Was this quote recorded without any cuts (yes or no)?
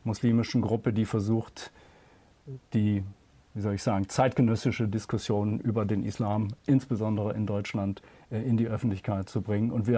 yes